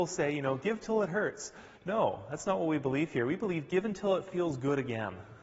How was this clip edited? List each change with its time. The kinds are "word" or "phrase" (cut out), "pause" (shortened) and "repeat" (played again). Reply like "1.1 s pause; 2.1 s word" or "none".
none

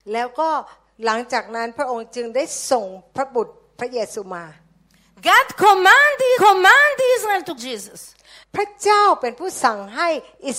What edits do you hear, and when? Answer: 6.4 s repeat; 7.6 s word; 8.4 s pause

